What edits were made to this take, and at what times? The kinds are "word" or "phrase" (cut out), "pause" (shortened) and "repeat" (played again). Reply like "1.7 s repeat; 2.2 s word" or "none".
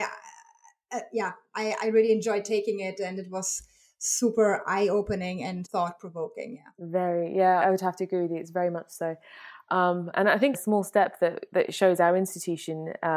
5.6 s word; 7.6 s word; 10.5 s phrase